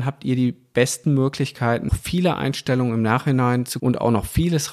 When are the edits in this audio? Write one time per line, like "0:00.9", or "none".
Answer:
0:01.9
0:03.8